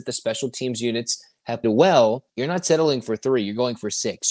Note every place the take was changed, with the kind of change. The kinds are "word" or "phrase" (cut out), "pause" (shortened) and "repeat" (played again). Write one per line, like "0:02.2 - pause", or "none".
0:01.6 - word
0:02.3 - pause

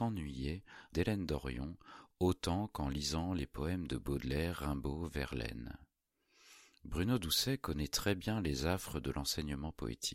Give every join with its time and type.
0:00.9 - phrase

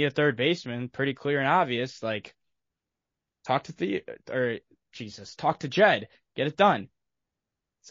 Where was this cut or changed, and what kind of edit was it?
none

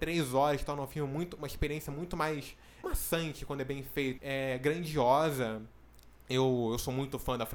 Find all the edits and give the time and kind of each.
0:02.8 - phrase
0:04.2 - word

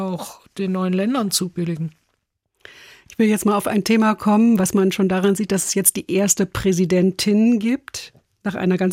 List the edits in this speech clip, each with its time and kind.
none

